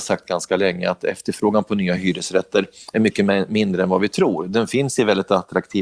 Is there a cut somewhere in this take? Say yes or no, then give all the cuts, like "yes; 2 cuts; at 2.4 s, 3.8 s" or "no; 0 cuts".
no; 0 cuts